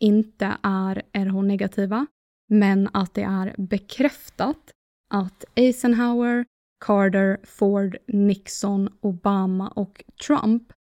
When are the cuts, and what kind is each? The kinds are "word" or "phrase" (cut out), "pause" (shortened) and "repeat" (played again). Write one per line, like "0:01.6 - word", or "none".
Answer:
none